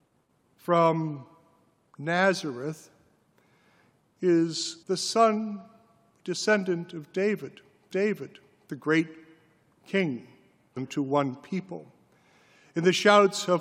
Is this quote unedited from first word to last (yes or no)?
no